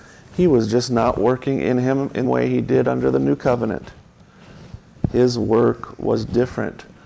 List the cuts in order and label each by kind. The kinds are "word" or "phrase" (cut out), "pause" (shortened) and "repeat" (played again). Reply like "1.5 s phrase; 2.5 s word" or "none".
2.2 s phrase

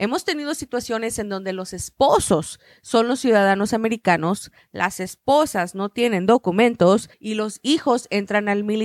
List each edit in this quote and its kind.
7.1 s pause

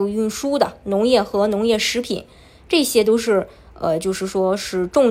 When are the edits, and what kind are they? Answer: none

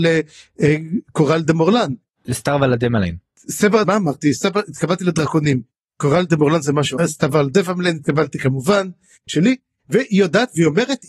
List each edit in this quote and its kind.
3.8 s word; 7.0 s word; 9.3 s word

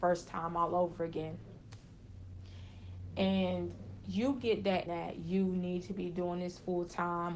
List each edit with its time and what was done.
4.9 s word

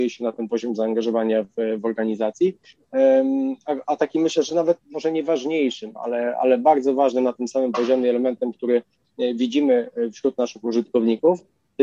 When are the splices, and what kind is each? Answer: 4.8 s pause

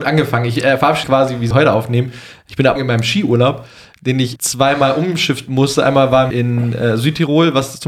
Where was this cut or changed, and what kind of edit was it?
1.0 s word; 1.5 s word; 2.8 s word; 4.4 s word; 6.3 s word

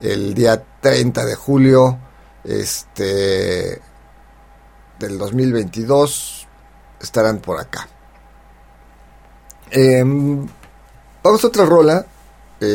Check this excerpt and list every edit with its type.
7.4 s word

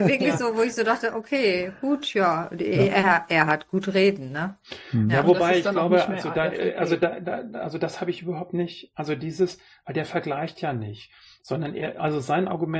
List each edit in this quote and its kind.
none

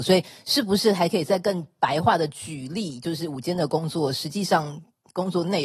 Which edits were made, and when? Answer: none

